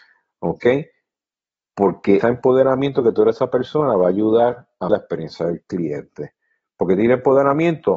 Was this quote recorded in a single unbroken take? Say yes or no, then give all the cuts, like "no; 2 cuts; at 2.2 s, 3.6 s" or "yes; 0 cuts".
no; 2 cuts; at 2.2 s, 4.9 s